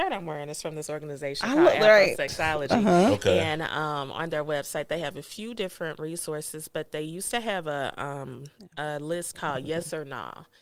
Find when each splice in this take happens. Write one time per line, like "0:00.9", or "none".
none